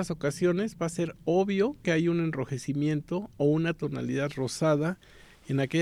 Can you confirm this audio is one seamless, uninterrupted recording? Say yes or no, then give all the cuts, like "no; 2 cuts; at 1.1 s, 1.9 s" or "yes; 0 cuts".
yes; 0 cuts